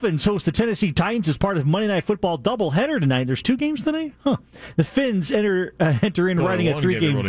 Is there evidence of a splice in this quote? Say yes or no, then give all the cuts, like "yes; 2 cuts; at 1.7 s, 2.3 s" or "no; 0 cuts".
no; 0 cuts